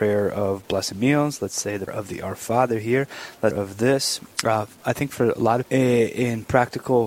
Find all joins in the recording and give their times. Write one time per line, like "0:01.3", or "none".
0:00.9
0:01.9
0:03.5
0:05.6